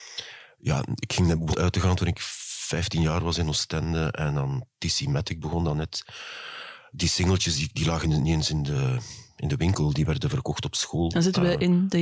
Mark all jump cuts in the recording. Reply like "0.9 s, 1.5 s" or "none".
1.5 s, 8.0 s